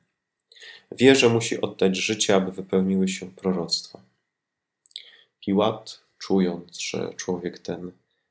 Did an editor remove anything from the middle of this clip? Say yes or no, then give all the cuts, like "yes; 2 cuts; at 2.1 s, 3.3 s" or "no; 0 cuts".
no; 0 cuts